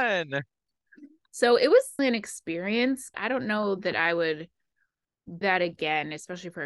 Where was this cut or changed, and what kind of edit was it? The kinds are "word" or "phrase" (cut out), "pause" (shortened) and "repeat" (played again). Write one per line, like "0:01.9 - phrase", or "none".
0:02.0 - word
0:03.1 - word
0:05.4 - word